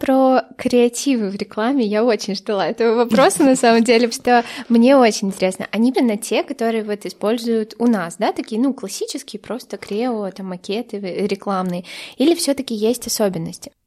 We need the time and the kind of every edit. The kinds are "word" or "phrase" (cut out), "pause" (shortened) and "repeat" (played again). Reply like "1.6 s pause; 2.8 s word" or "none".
4.1 s word; 5.9 s word